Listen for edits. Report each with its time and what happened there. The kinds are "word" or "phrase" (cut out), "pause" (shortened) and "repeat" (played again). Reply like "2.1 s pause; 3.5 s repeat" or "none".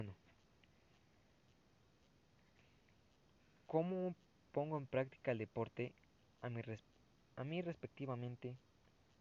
none